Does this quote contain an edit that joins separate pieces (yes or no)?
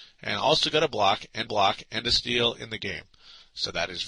yes